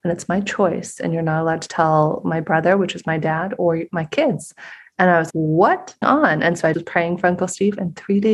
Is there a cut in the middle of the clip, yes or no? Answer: yes